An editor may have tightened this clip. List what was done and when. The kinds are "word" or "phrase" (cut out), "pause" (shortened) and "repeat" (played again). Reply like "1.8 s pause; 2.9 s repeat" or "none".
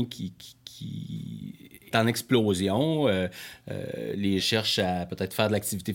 1.9 s word; 4.4 s word